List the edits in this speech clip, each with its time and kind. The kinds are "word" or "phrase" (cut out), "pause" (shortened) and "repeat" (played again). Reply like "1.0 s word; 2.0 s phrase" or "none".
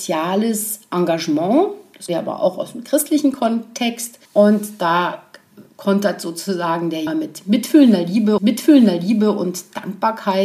2.1 s word; 4.3 s pause; 5.7 s pause; 7.1 s word; 8.4 s repeat